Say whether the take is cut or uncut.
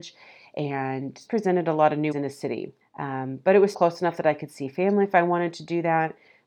cut